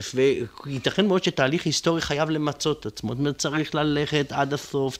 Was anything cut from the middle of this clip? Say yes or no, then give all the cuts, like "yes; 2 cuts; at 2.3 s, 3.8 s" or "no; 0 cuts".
no; 0 cuts